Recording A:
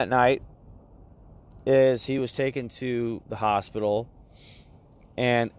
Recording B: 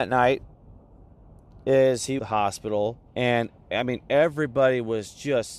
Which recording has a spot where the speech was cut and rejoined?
B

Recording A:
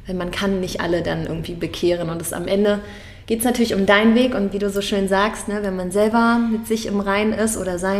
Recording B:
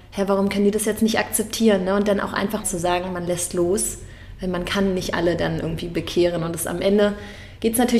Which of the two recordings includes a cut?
B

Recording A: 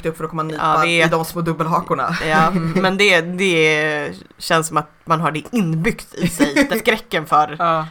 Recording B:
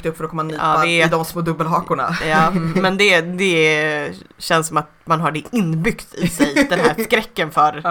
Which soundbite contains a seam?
A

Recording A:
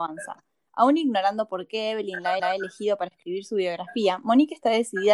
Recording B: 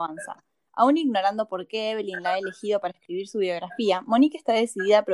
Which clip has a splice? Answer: A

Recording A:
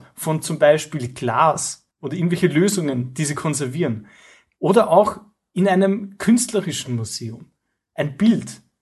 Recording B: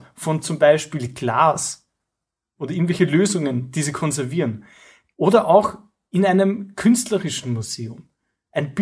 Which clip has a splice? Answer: A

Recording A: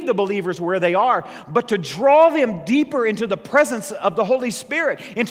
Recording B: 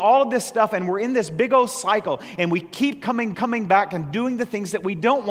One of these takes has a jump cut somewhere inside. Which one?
B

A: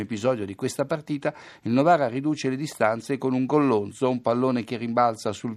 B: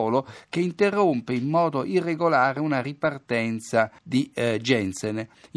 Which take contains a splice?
B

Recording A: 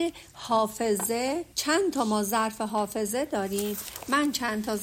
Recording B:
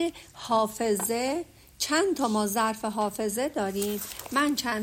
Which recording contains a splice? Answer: A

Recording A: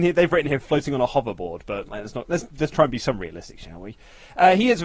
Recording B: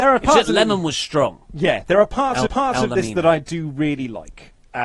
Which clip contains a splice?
B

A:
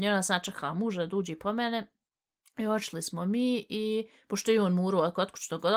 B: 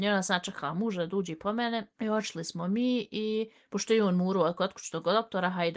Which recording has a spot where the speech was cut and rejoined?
B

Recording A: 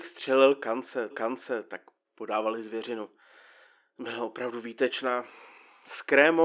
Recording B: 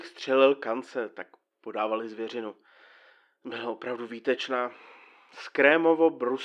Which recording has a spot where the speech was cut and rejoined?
A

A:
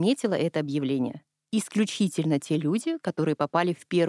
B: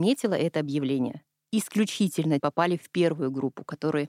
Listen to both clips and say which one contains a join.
B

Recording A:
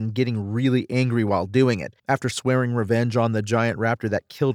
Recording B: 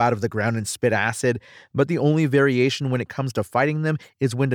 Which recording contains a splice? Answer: A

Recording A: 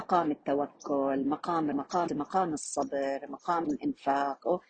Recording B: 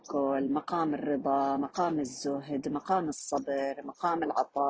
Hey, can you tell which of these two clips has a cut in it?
A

